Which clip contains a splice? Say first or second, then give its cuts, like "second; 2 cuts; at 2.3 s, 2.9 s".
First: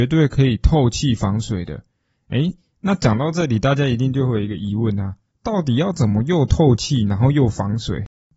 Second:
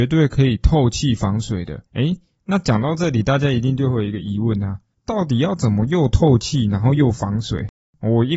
second; 1 cut; at 1.9 s